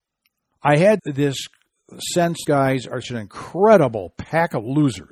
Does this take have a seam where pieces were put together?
yes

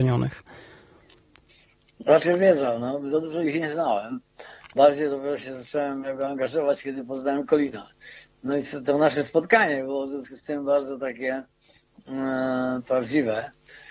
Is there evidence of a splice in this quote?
no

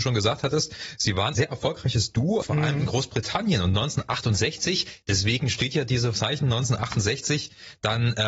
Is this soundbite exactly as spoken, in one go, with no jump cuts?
no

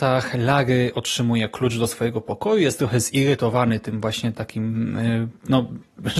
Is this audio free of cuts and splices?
yes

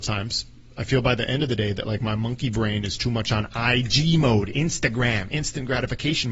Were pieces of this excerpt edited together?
no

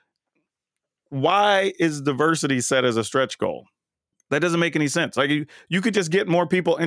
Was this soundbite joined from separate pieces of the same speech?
yes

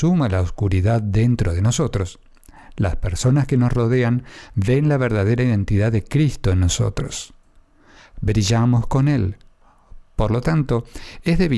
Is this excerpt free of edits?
yes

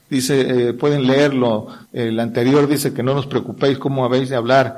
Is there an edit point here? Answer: yes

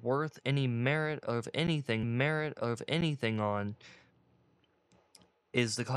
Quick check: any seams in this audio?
yes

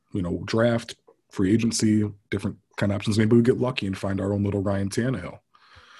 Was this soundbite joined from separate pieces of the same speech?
no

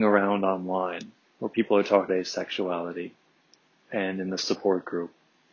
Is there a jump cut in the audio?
yes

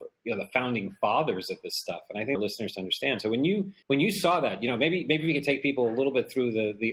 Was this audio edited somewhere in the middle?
yes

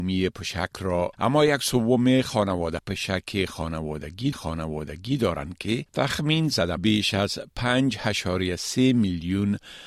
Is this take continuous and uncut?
no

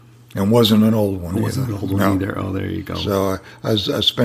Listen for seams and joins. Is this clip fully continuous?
yes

